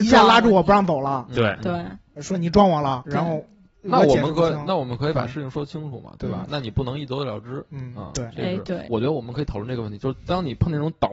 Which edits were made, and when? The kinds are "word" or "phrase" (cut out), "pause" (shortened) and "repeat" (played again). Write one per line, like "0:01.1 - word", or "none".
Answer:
0:03.0 - word